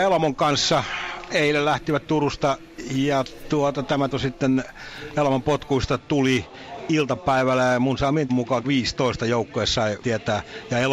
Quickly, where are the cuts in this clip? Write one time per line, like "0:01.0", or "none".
0:04.1
0:08.3
0:08.6
0:10.0